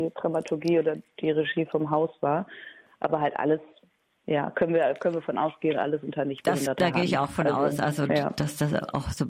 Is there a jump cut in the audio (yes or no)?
no